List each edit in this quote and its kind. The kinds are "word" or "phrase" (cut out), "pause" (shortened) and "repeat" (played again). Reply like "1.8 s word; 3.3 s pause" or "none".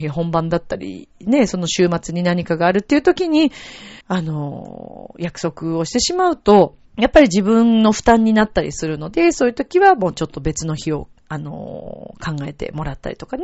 4.0 s pause; 6.9 s pause